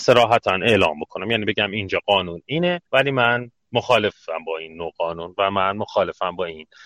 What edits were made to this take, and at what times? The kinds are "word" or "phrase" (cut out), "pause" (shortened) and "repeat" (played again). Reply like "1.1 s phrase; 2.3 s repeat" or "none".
2.9 s pause